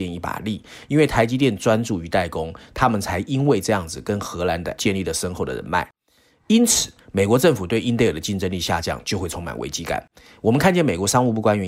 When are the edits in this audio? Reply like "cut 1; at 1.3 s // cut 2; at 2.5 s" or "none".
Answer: cut 1; at 4.8 s